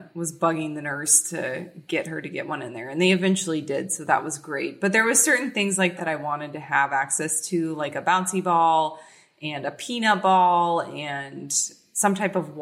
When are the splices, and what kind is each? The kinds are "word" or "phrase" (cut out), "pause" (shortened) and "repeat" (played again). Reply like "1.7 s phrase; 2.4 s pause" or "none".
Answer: 6.0 s word